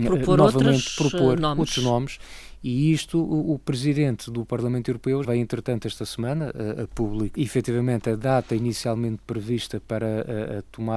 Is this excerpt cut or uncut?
cut